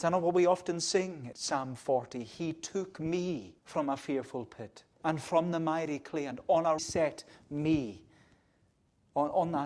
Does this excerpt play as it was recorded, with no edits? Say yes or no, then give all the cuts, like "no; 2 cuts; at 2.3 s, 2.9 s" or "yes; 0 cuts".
no; 4 cuts; at 1.3 s, 3.6 s, 4.9 s, 6.8 s